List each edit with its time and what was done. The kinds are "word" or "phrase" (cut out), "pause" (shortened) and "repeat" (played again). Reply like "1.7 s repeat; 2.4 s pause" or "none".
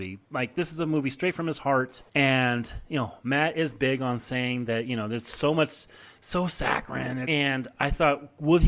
2.1 s pause